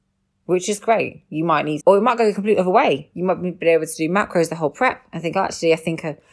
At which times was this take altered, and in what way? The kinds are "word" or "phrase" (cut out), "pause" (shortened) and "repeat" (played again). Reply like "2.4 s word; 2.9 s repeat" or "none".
1.8 s phrase